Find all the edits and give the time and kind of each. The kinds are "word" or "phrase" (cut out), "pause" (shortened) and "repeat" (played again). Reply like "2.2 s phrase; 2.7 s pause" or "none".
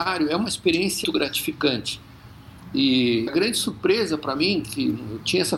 1.0 s word; 3.3 s word